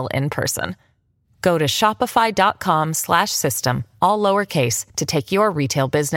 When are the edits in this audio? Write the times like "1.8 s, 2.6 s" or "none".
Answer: 4.9 s